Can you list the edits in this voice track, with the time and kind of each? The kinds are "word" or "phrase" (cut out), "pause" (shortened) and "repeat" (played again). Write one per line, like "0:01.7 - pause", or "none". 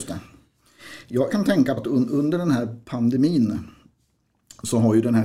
0:01.3 - word
0:01.8 - word